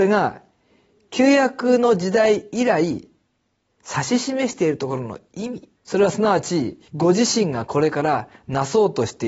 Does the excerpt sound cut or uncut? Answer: cut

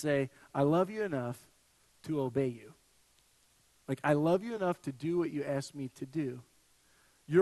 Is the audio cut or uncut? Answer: uncut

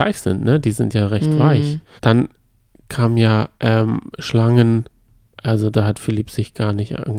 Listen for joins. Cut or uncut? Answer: cut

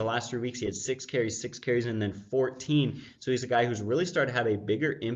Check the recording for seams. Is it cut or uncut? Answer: uncut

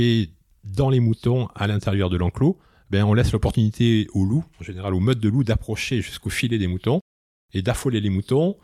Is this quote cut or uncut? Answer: cut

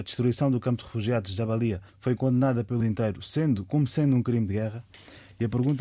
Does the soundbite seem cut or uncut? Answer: cut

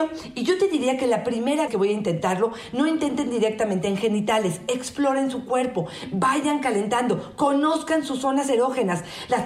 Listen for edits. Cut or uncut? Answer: cut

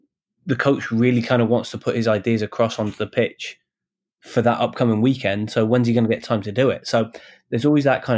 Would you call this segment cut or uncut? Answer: uncut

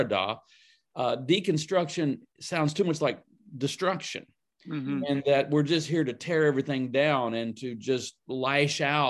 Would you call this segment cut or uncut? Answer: uncut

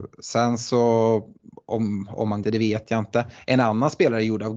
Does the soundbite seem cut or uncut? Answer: cut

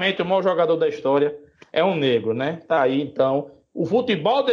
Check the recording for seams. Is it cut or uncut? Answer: uncut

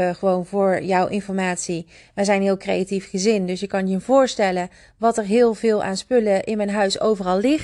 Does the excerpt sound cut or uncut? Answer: uncut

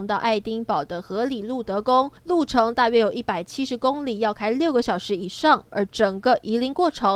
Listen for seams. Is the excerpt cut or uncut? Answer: cut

